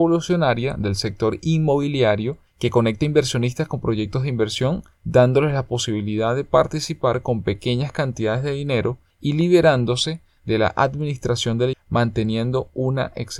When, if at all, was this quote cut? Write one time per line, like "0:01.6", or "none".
0:11.7